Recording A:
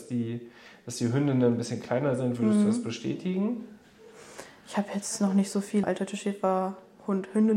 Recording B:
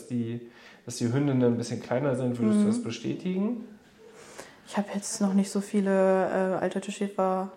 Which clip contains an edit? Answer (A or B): A